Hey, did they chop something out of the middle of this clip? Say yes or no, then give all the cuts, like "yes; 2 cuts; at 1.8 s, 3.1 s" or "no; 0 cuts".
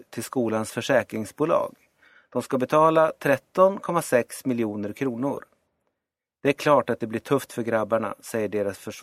no; 0 cuts